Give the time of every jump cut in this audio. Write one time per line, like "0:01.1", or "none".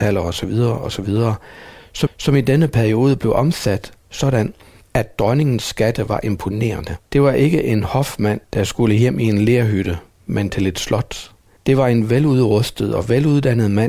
0:02.1
0:07.1
0:08.4
0:11.6

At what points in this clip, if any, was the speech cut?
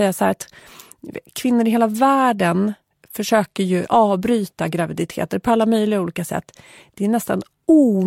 none

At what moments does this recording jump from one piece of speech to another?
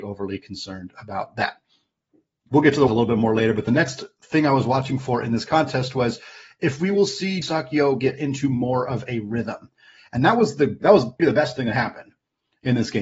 0:02.9
0:07.4
0:10.8
0:11.2

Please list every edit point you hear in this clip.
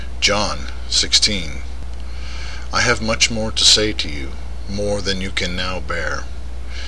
none

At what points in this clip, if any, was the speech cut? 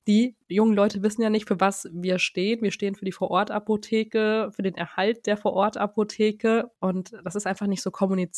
0:06.8

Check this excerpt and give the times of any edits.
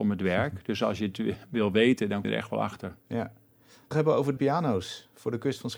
0:02.2
0:03.9
0:04.4

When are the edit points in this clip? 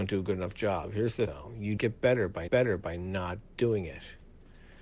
0:01.3
0:01.8
0:02.5

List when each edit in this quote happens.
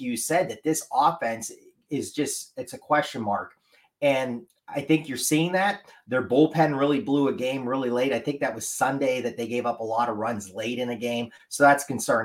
none

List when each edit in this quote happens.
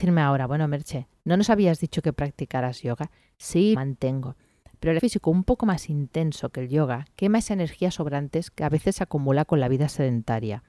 0:03.7
0:05.0

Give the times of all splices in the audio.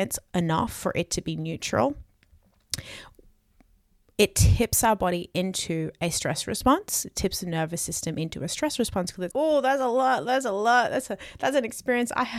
0:09.3

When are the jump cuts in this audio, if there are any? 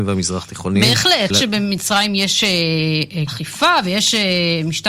0:01.3
0:03.3

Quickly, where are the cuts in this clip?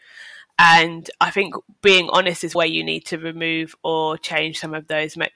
0:02.5

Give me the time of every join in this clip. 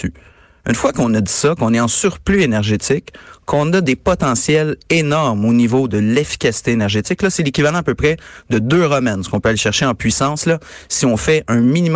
none

